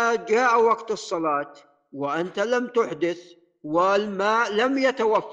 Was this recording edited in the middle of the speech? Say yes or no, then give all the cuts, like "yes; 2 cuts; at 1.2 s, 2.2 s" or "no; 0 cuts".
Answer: no; 0 cuts